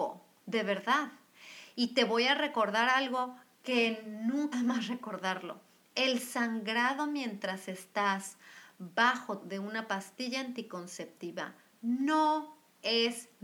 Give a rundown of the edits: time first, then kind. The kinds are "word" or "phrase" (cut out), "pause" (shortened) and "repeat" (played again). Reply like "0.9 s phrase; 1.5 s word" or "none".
4.5 s word; 9.4 s word